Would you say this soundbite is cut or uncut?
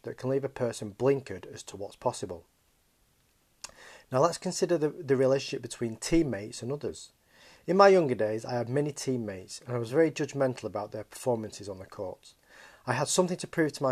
uncut